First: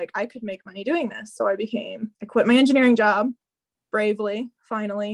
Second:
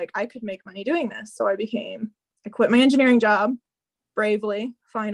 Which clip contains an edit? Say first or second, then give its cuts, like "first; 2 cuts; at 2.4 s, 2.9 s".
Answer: first; 1 cut; at 2.1 s